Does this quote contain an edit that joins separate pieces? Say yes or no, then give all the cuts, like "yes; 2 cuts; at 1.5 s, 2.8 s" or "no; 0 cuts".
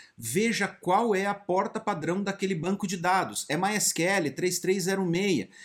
no; 0 cuts